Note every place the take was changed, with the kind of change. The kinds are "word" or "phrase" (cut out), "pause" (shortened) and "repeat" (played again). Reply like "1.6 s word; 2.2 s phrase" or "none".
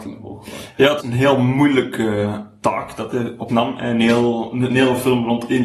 1.0 s word; 3.5 s word